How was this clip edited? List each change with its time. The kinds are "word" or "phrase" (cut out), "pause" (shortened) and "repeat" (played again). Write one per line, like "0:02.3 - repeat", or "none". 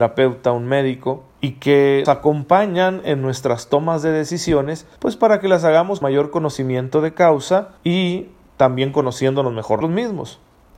0:01.3 - pause
0:02.1 - word
0:05.0 - pause
0:06.0 - word
0:07.8 - pause
0:09.8 - word